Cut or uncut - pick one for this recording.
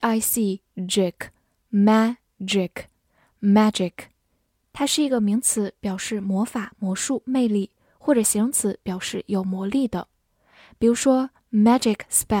uncut